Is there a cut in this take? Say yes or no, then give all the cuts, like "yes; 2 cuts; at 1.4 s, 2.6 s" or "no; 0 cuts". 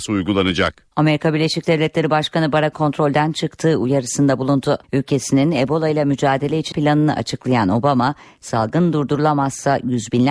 yes; 4 cuts; at 0.9 s, 2.7 s, 4.8 s, 6.7 s